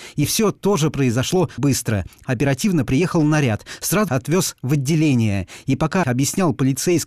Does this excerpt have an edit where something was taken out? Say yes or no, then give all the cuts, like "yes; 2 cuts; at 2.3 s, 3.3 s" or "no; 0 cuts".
yes; 4 cuts; at 1.6 s, 2.2 s, 4.1 s, 6.0 s